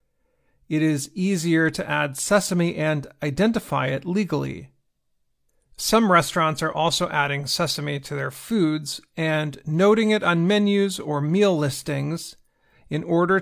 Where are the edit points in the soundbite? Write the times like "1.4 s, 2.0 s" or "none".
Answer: 5.5 s

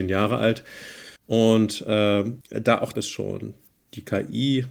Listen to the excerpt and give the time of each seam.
1.2 s, 2.4 s, 2.9 s

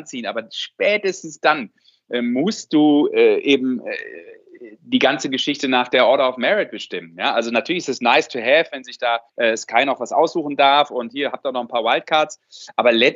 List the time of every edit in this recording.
9.3 s

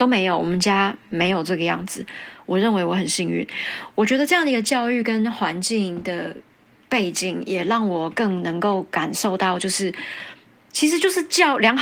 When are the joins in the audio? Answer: none

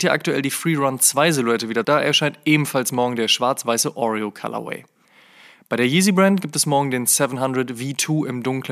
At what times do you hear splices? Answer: 1.8 s

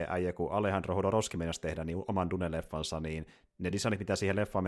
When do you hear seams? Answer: none

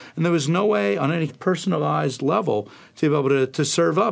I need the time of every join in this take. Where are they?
1.3 s

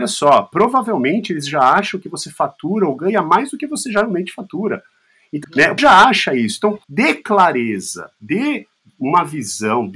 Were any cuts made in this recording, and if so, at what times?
5.4 s, 5.8 s, 6.8 s

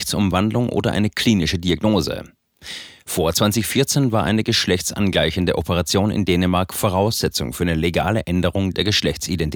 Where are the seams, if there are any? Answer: none

